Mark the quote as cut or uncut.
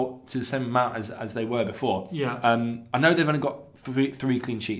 uncut